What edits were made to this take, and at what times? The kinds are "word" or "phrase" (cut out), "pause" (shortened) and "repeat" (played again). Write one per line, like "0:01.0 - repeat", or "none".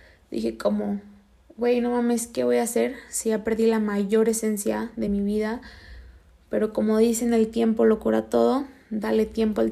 none

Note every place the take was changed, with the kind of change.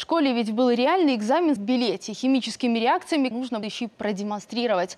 0:01.6 - phrase
0:03.3 - word
0:03.6 - word

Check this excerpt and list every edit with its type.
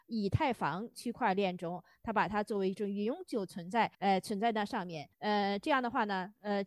0:03.9 - pause
0:05.1 - pause

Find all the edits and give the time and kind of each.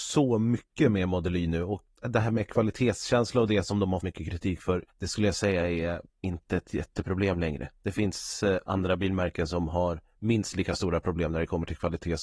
0:04.0 - word
0:04.9 - pause
0:06.1 - pause

